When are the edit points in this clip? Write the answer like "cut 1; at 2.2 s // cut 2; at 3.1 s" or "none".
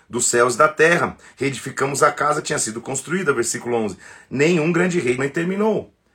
cut 1; at 2.4 s // cut 2; at 5.2 s